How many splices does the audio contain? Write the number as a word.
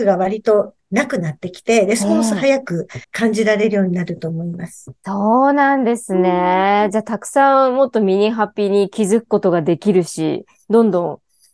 one